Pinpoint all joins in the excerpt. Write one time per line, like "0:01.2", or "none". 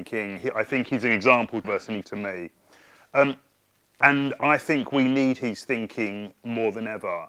0:01.6
0:02.0